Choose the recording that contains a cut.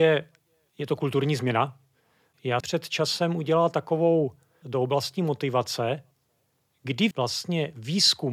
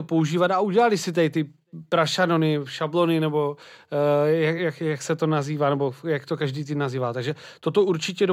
first; 3 cuts; at 2.6 s, 4.6 s, 7.1 s

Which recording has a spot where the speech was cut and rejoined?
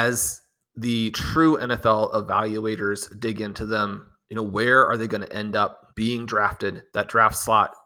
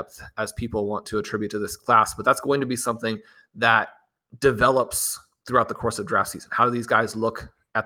first; 2 cuts; at 5.9 s, 6.9 s

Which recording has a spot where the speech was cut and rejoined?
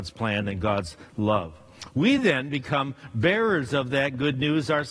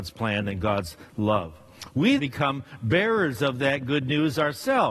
second; 1 cut; at 2.2 s

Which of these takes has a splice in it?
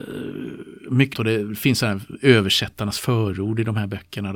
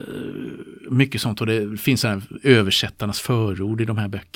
first; 1 cut; at 1.1 s

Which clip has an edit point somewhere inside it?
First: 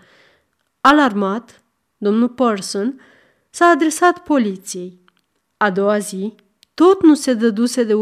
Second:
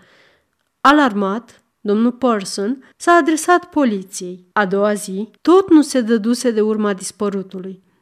second; 4 cuts; at 1.7 s, 2.9 s, 4.5 s, 5.4 s

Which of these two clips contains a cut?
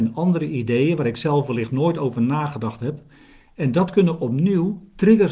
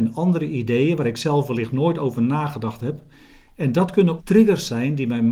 second; 1 cut; at 4.2 s

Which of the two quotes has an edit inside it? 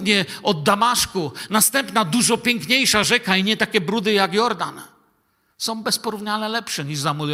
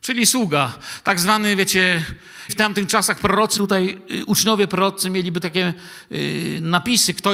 second; 3 cuts; at 2.5 s, 3.6 s, 5.4 s

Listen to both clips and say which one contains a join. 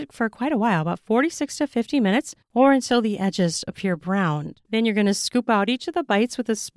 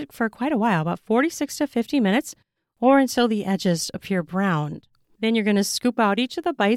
first; 2 cuts; at 2.4 s, 4.6 s

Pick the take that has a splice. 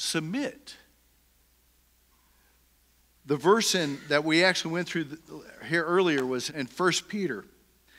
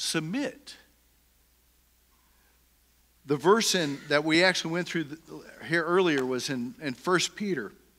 first; 1 cut; at 6.5 s

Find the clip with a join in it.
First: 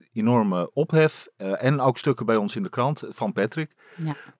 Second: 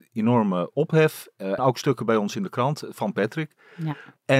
second; 1 cut; at 1.6 s

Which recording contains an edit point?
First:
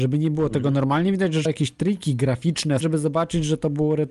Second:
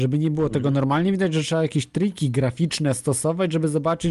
first; 2 cuts; at 1.5 s, 2.8 s

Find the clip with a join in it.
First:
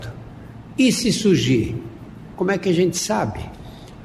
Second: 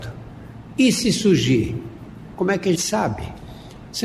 second; 1 cut; at 2.8 s

